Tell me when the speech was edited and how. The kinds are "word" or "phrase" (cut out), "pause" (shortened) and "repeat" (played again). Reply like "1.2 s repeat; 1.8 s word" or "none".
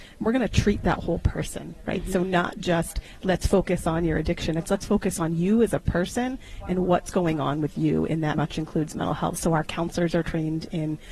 8.3 s word